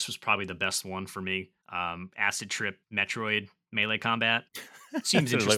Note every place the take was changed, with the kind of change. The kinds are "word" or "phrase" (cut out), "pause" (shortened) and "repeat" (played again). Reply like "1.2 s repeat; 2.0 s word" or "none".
1.6 s pause; 2.8 s pause; 4.5 s pause